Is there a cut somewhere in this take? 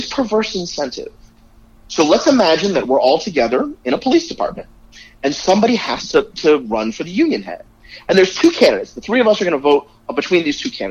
no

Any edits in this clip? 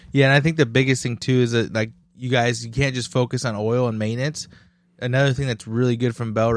no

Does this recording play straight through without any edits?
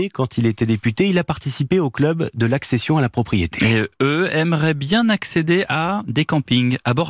yes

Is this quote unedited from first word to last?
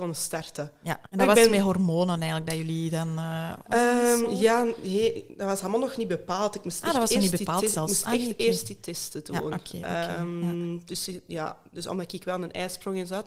no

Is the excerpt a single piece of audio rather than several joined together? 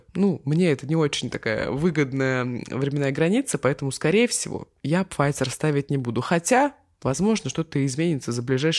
yes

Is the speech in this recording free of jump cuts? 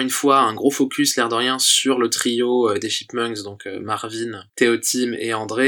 no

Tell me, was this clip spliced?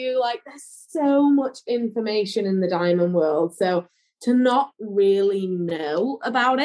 no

